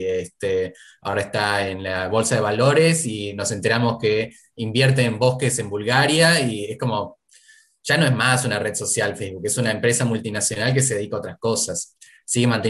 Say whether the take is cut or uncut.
uncut